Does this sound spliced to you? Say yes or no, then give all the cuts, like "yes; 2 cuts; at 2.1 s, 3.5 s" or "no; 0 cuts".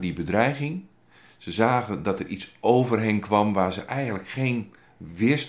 no; 0 cuts